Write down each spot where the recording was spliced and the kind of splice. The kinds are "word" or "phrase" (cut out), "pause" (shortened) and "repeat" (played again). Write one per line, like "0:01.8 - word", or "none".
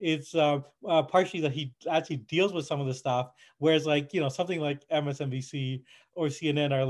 0:01.8 - pause